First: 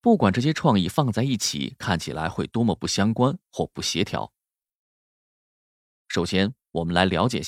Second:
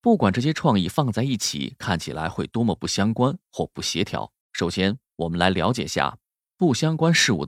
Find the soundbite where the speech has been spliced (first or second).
second